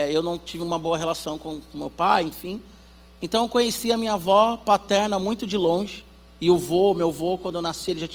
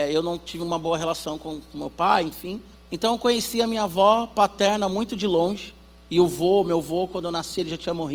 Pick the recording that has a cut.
second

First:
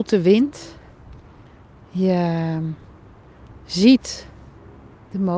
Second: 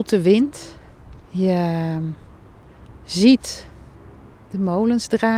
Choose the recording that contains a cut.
second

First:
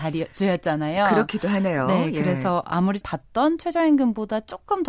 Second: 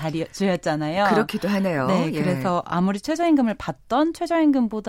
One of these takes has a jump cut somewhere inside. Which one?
first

